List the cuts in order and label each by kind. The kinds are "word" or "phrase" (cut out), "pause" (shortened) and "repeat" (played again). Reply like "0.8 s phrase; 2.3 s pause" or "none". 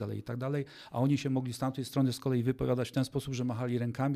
none